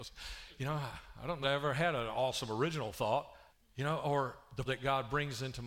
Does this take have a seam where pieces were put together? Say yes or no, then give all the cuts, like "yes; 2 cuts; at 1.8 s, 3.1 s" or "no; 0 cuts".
yes; 3 cuts; at 1.4 s, 3.5 s, 4.6 s